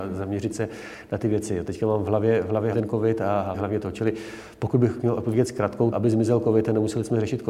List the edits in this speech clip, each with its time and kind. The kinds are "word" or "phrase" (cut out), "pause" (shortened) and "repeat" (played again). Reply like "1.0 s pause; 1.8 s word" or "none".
2.7 s word; 3.5 s word; 5.9 s word